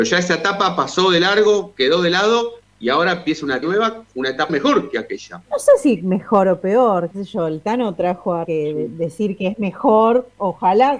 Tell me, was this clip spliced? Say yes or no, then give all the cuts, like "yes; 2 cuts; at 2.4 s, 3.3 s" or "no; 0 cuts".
yes; 5 cuts; at 3.6 s, 4.5 s, 5.4 s, 7.1 s, 8.4 s